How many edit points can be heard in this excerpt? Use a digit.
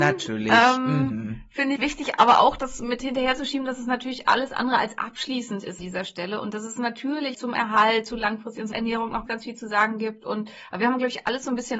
5